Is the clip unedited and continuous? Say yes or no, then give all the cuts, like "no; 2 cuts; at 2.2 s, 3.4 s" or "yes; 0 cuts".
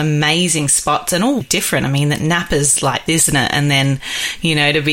no; 2 cuts; at 1.4 s, 3.1 s